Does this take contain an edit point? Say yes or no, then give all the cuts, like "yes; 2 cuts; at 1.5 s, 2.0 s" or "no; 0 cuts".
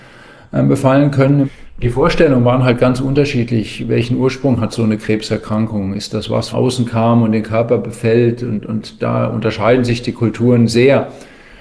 yes; 1 cut; at 6.5 s